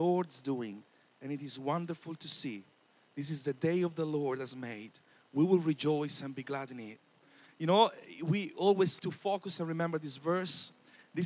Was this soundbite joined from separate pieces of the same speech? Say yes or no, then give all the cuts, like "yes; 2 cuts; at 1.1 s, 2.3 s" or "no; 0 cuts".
yes; 1 cut; at 9.0 s